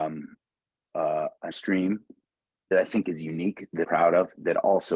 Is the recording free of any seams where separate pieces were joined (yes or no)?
no